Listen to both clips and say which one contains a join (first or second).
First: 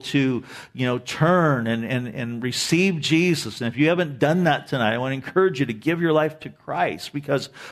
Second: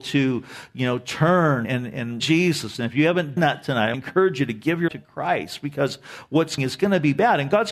second